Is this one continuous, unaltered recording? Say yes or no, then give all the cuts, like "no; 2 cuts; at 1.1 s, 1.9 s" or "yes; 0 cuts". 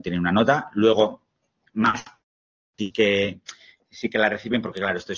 yes; 0 cuts